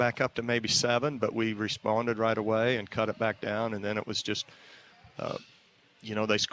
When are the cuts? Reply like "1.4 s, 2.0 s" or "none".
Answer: none

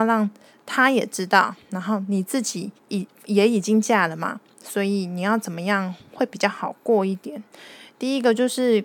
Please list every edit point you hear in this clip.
2.8 s

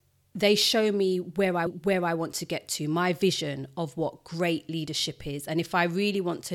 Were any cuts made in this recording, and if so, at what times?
1.7 s

